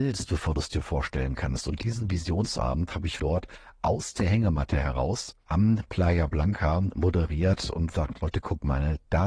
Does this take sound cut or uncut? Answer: cut